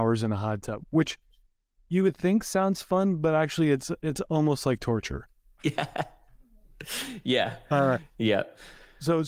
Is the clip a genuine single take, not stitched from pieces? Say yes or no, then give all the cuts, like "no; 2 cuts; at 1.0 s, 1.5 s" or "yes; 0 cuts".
yes; 0 cuts